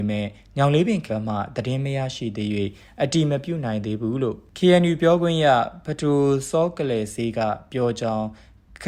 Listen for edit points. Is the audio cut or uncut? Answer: cut